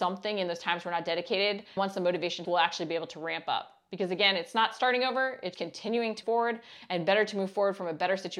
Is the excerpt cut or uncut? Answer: cut